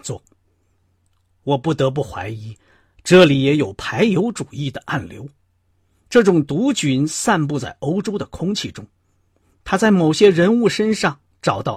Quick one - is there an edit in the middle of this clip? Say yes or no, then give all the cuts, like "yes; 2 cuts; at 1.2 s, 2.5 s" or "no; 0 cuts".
no; 0 cuts